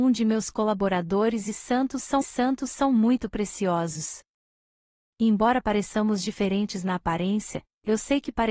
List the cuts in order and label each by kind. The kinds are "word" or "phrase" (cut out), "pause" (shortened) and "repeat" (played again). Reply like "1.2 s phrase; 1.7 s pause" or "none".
2.2 s repeat